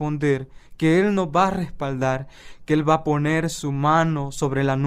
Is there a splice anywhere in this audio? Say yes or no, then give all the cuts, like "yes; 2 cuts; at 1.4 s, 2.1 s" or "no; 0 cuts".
no; 0 cuts